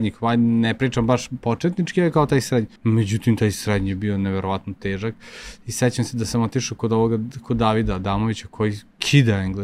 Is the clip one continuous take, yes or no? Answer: no